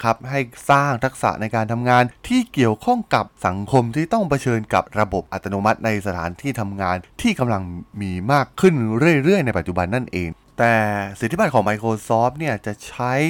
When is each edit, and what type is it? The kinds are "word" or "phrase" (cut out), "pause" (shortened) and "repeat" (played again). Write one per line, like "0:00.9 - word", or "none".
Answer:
none